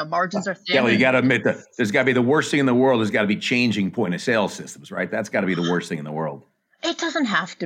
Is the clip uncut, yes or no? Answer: yes